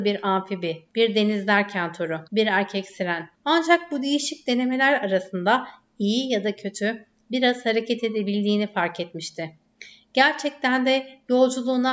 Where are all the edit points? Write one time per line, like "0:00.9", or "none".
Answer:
0:00.9
0:02.3
0:03.3